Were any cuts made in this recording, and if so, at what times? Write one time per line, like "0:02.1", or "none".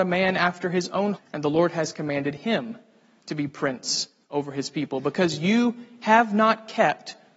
0:01.1